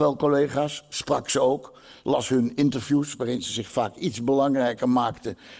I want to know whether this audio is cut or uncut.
uncut